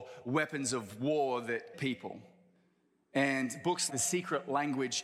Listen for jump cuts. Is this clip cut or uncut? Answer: cut